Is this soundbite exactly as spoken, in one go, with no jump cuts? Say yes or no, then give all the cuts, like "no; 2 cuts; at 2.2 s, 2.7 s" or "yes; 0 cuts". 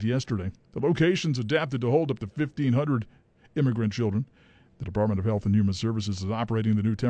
yes; 0 cuts